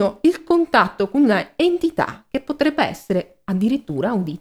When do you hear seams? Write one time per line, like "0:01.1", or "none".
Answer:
none